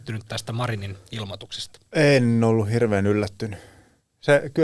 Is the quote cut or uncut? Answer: uncut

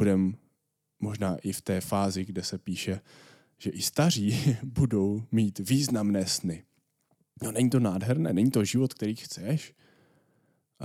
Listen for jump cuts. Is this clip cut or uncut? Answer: uncut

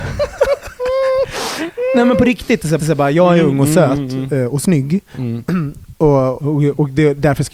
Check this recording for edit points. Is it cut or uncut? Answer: cut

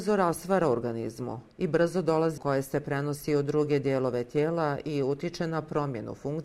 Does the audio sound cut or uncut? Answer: cut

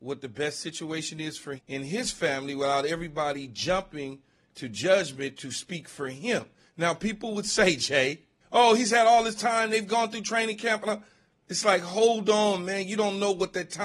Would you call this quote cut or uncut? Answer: cut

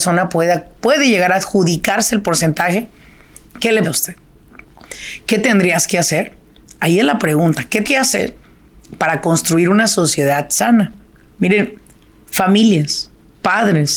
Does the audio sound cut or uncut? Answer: cut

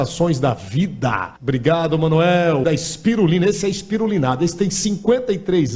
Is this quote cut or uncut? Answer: cut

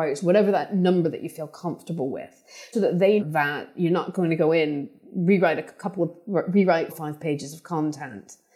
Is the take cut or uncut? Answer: cut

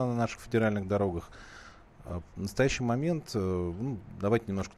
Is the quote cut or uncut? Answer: uncut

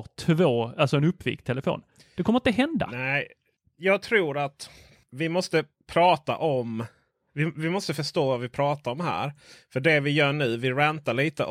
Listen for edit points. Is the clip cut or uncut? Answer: uncut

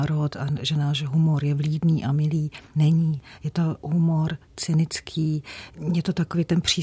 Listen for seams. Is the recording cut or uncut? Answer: uncut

